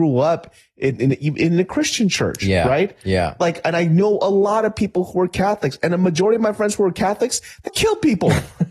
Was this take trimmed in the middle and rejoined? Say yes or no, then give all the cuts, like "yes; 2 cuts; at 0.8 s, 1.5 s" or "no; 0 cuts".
yes; 1 cut; at 7.7 s